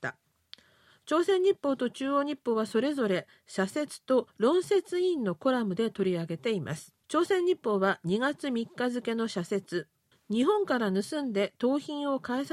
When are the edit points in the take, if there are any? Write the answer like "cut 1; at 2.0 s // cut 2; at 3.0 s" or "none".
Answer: cut 1; at 4.3 s // cut 2; at 7.0 s // cut 3; at 10.1 s